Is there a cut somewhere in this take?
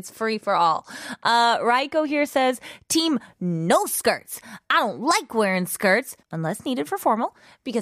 yes; 1 cut; at 6.2 s

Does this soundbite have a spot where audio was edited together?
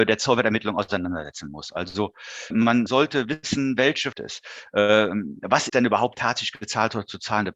yes; 5 cuts; at 2.5 s, 2.9 s, 4.1 s, 5.7 s, 6.1 s

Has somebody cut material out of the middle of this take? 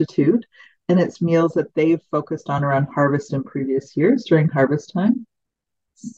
no; 0 cuts

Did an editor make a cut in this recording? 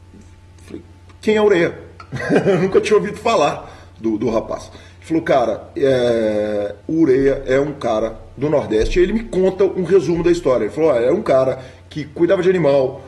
yes; 1 cut; at 6.8 s

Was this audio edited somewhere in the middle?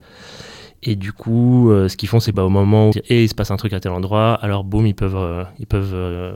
yes; 2 cuts; at 2.3 s, 2.9 s

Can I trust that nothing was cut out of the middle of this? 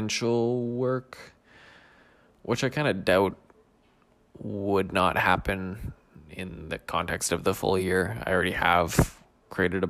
yes; 0 cuts

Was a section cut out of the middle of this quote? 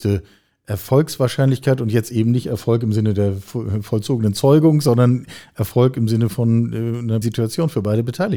yes; 1 cut; at 7.2 s

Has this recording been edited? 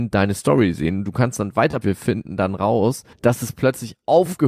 yes; 2 cuts; at 1.8 s, 3.1 s

